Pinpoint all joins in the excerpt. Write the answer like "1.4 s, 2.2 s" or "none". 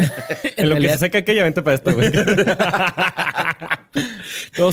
none